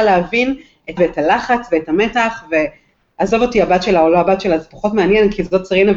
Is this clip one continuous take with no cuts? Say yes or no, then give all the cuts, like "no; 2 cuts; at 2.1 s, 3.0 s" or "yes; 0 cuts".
no; 1 cut; at 1.0 s